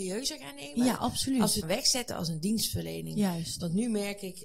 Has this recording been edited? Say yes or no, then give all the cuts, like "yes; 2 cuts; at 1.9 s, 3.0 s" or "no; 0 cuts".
yes; 1 cut; at 1.6 s